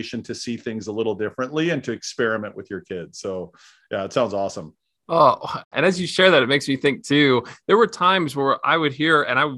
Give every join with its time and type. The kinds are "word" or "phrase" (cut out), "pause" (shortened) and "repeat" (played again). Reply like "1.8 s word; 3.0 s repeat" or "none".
none